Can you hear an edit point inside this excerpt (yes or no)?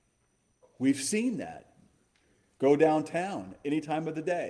no